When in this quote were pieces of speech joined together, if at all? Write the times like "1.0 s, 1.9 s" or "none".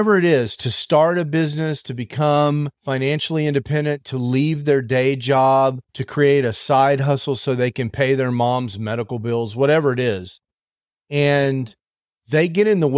2.7 s, 5.8 s, 11.9 s